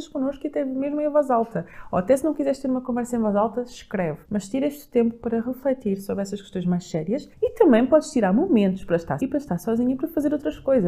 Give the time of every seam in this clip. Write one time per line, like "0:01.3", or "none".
0:04.2
0:07.3
0:09.2